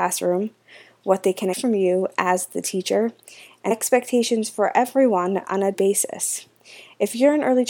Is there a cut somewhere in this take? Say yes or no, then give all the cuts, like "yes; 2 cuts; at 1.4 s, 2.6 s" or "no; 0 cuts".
yes; 3 cuts; at 1.5 s, 3.7 s, 5.7 s